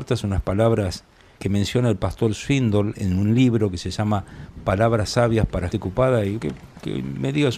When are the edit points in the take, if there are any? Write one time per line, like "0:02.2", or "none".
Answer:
0:01.4
0:02.9
0:05.7
0:06.4